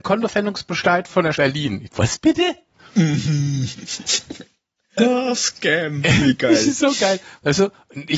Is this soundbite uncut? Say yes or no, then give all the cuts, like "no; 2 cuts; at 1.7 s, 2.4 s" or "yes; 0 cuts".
no; 3 cuts; at 1.4 s, 1.9 s, 5.0 s